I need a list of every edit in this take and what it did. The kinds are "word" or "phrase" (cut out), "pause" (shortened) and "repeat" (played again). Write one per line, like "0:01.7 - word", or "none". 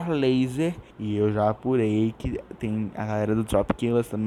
0:00.9 - pause